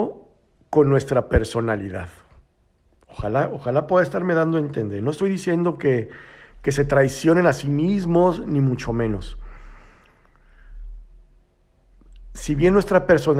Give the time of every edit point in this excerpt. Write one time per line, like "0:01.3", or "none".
none